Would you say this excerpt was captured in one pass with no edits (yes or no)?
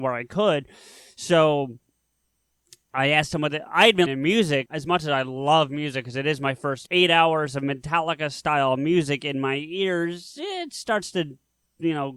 no